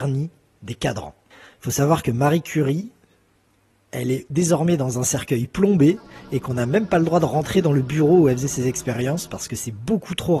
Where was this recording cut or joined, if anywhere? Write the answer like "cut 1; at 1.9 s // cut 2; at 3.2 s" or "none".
none